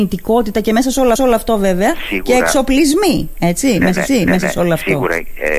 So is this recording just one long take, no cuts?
no; 2 cuts; at 1.2 s, 4.1 s

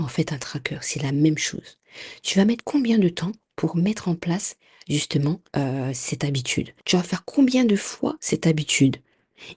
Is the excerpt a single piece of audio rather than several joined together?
no; 2 cuts; at 5.5 s, 6.8 s

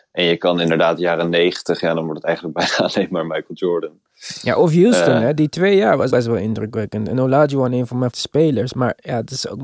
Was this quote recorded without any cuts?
no; 2 cuts; at 6.1 s, 8.1 s

